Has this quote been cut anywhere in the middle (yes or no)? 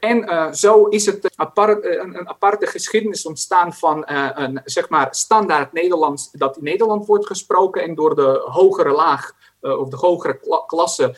yes